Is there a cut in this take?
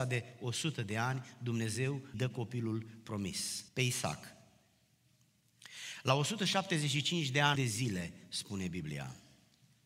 yes; 3 cuts; at 2.1 s, 3.7 s, 7.6 s

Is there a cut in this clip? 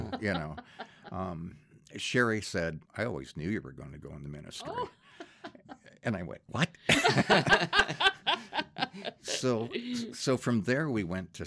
yes; 1 cut; at 2.9 s

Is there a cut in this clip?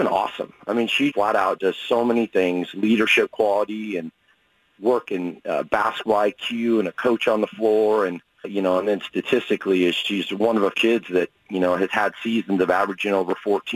yes; 6 cuts; at 1.1 s, 1.6 s, 5.1 s, 8.4 s, 10.0 s, 10.7 s

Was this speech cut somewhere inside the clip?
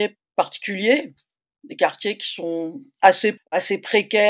yes; 1 cut; at 3.4 s

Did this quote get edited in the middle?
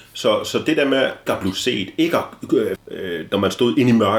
yes; 2 cuts; at 1.3 s, 2.8 s

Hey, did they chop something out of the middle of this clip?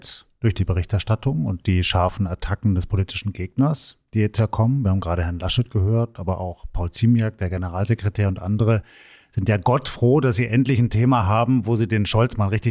no; 0 cuts

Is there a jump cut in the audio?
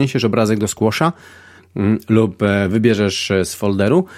no; 0 cuts

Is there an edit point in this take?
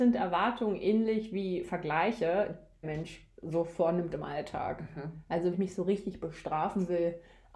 yes; 2 cuts; at 2.8 s, 5.5 s

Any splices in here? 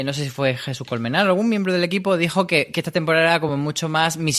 no; 0 cuts

